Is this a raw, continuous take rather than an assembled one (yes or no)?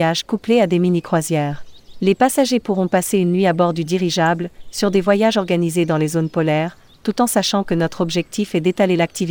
yes